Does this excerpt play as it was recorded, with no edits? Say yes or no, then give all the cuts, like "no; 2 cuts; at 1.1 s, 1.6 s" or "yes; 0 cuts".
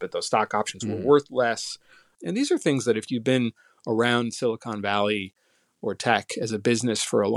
yes; 0 cuts